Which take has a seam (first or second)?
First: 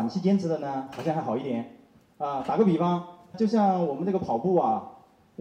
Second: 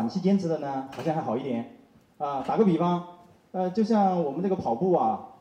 first